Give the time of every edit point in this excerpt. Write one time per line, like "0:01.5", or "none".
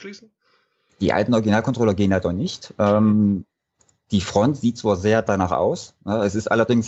none